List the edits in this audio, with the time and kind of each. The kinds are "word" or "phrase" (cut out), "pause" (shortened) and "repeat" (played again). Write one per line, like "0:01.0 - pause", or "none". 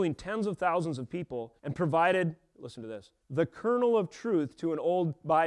0:01.6 - pause
0:03.2 - pause

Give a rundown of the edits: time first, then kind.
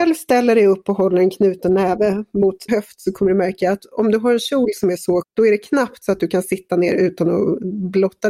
0:02.7 - word
0:05.2 - word

